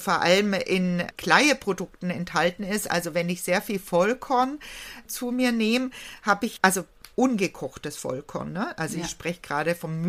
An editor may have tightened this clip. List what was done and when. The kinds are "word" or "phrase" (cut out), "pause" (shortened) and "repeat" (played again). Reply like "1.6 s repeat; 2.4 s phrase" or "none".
7.1 s pause